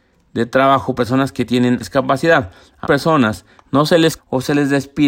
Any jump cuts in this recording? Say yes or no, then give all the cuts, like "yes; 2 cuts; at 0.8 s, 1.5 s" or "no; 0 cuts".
yes; 4 cuts; at 1.0 s, 1.8 s, 2.8 s, 4.2 s